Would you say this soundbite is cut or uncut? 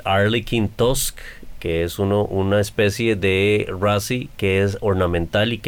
uncut